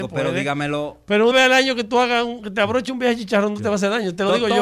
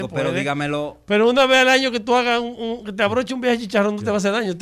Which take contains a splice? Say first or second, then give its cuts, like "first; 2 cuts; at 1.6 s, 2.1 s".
first; 2 cuts; at 1.3 s, 2.4 s